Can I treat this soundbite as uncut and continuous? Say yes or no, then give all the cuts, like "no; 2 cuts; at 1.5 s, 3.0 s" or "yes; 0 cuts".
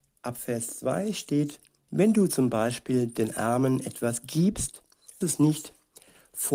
no; 1 cut; at 5.2 s